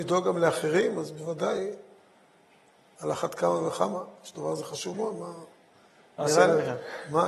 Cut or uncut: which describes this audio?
uncut